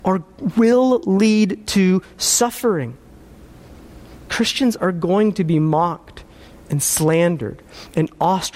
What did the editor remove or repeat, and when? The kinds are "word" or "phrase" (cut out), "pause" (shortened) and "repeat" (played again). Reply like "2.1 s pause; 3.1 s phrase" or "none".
none